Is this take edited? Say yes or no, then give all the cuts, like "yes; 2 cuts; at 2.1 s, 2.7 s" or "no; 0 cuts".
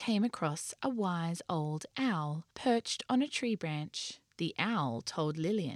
yes; 2 cuts; at 2.5 s, 4.3 s